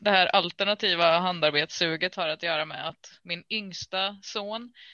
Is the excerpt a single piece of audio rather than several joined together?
yes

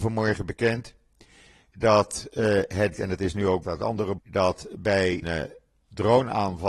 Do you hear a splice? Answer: yes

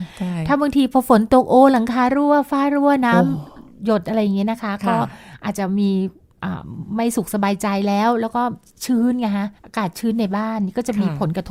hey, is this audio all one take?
no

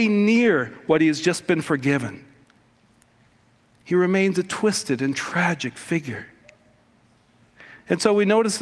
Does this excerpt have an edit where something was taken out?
no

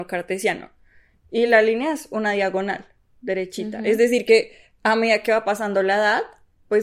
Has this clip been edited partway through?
no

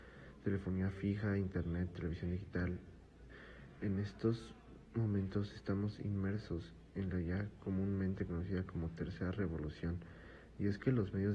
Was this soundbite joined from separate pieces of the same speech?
no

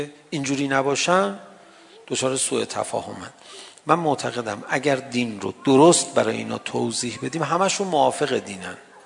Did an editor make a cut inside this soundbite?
no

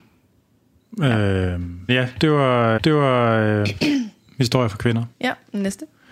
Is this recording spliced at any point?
yes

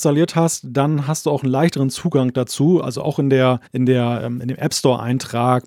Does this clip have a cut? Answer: yes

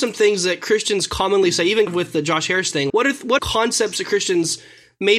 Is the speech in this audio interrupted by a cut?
yes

